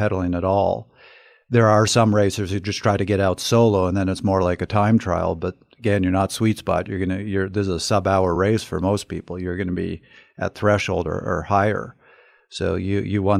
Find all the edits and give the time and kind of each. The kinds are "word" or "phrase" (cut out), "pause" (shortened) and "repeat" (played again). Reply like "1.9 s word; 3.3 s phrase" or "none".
none